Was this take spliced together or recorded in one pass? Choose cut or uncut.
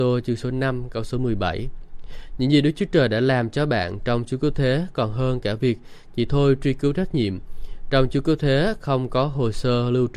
uncut